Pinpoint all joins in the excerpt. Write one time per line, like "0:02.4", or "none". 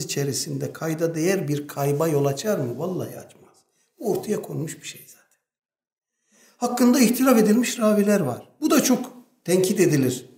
none